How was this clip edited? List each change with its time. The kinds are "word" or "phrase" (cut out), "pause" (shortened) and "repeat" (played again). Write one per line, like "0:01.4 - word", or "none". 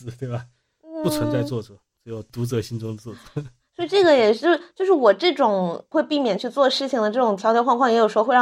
none